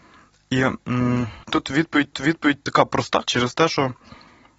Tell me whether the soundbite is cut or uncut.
cut